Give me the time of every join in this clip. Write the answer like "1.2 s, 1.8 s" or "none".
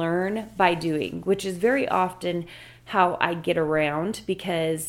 none